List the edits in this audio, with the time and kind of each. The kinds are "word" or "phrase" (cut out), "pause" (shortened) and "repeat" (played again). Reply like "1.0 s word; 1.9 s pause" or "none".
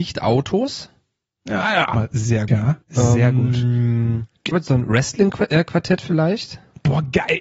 1.9 s word; 2.5 s word; 2.8 s pause; 4.5 s phrase